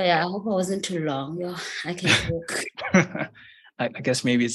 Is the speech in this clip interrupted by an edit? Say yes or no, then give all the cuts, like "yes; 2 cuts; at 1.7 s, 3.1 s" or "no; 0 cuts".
no; 0 cuts